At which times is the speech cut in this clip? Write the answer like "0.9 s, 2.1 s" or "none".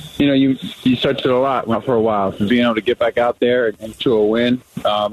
1.2 s, 1.7 s, 2.5 s, 4.0 s